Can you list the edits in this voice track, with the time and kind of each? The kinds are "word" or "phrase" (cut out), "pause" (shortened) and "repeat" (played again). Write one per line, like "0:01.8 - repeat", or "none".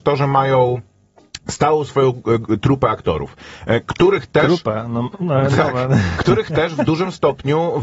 none